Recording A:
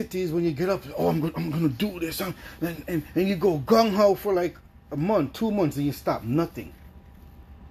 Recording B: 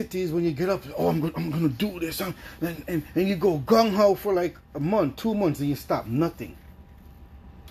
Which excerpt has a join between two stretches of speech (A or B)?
B